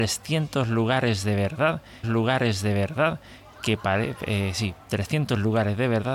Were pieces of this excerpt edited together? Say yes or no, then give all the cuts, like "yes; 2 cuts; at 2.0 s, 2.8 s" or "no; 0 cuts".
yes; 1 cut; at 2.0 s